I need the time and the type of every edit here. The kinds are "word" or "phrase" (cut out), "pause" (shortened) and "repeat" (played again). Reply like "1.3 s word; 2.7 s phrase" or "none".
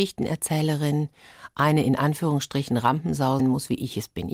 3.4 s word